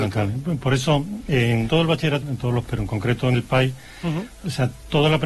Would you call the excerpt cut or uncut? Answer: cut